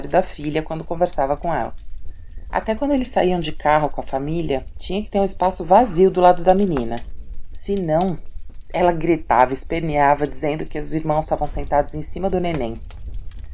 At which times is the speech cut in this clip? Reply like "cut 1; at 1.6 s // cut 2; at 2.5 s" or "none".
none